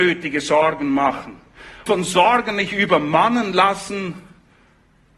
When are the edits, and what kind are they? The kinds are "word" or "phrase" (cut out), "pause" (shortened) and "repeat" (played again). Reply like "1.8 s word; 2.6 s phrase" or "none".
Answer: 1.9 s word